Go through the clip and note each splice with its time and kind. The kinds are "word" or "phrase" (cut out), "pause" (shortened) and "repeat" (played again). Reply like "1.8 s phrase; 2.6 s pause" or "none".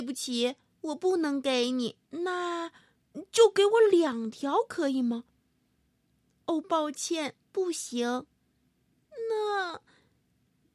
2.0 s pause; 7.4 s pause